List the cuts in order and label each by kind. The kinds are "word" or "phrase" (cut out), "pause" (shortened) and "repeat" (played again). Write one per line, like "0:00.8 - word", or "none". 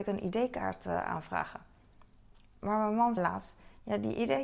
0:03.2 - word